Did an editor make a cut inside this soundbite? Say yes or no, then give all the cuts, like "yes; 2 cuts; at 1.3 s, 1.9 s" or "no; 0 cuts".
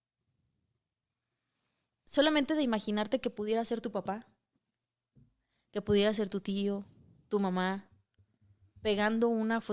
no; 0 cuts